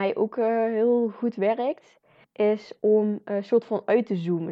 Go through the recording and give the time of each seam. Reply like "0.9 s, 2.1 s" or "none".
2.2 s